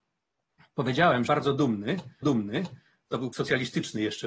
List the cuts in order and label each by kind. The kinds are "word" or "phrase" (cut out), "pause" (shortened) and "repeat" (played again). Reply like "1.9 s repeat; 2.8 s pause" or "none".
1.3 s phrase; 2.2 s repeat; 3.3 s word